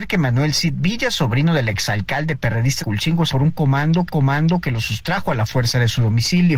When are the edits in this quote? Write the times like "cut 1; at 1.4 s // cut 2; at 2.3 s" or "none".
cut 1; at 2.8 s // cut 2; at 3.3 s // cut 3; at 4.1 s